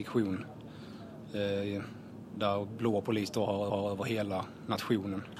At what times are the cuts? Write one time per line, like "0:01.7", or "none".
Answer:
0:03.7